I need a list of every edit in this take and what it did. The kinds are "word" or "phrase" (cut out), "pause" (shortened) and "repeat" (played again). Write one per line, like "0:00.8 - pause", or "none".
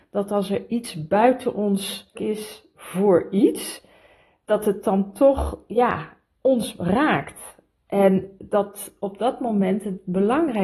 0:02.1 - word